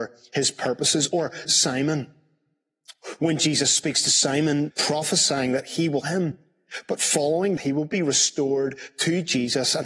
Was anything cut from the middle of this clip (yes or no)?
yes